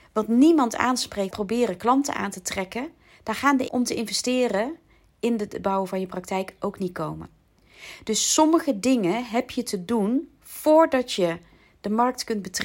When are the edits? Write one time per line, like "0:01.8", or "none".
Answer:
0:01.3
0:03.7